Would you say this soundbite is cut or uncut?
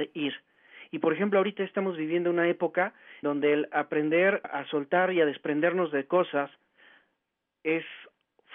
cut